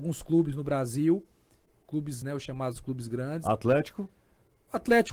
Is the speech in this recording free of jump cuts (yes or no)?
no